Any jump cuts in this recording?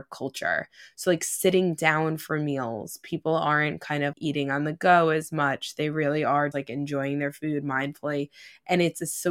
yes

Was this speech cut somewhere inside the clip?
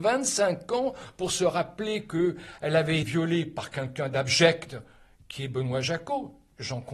yes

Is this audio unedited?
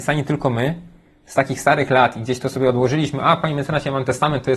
yes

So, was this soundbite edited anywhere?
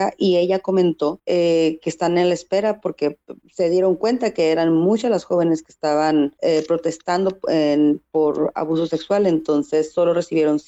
no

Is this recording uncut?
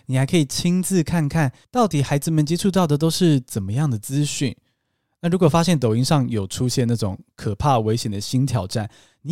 yes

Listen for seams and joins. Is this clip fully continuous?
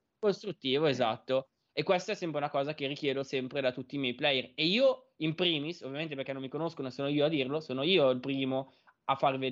yes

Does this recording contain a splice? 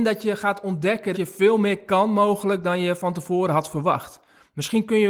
yes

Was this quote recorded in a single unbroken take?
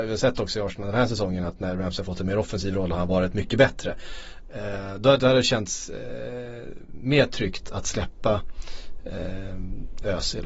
no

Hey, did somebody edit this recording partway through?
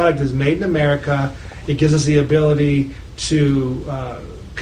no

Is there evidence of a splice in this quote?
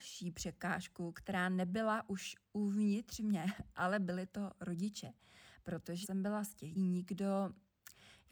yes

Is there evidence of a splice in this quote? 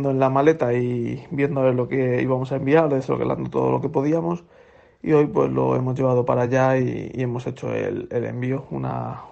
no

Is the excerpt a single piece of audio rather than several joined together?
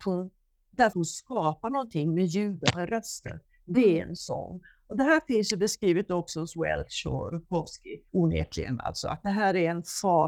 no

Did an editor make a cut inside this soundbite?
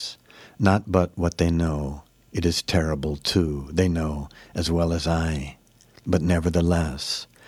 no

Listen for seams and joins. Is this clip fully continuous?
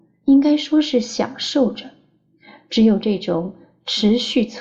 yes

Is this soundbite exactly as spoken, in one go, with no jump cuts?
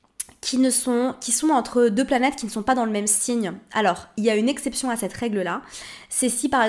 yes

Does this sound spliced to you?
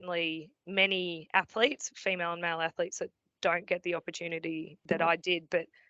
no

